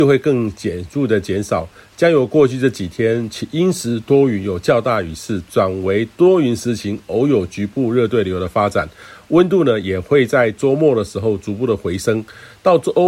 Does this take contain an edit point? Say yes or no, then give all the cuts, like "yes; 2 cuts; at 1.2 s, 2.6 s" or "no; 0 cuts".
no; 0 cuts